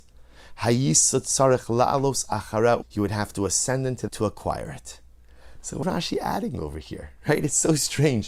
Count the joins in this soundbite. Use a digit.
3